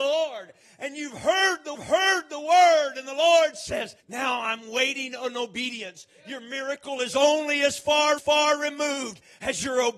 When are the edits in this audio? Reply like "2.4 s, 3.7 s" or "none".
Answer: 1.7 s, 4.0 s, 8.2 s